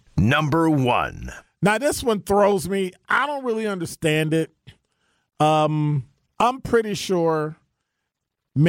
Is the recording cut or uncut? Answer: uncut